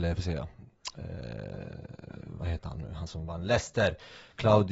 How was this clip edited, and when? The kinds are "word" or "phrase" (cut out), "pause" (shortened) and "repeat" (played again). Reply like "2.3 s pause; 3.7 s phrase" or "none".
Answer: none